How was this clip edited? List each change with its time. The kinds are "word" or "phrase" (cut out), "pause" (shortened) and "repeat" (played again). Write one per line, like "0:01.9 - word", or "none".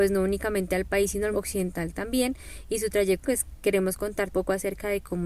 0:01.3 - word
0:03.2 - word
0:04.3 - word